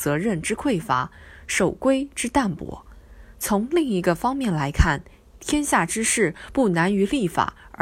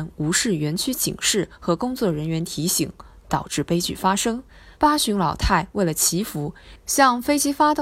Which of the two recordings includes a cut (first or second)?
second